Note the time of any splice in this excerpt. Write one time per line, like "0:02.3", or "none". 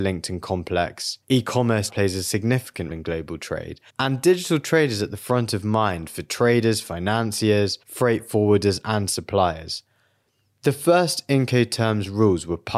0:01.2
0:01.9
0:02.9
0:03.9
0:07.8